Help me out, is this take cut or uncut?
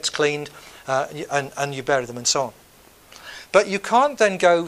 uncut